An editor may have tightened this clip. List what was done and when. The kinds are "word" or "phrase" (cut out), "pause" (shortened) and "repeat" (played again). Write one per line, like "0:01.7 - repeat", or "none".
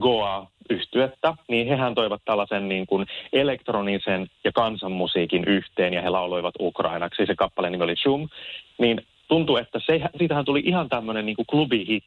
none